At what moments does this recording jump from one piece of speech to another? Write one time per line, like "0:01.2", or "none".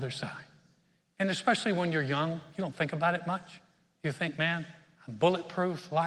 none